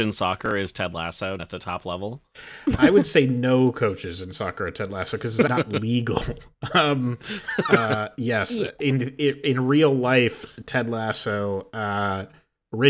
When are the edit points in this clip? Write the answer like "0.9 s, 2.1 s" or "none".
1.4 s, 5.5 s